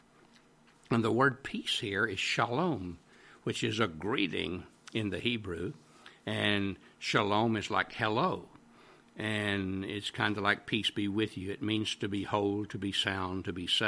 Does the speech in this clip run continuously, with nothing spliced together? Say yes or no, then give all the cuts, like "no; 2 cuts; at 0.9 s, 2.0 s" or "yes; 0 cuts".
yes; 0 cuts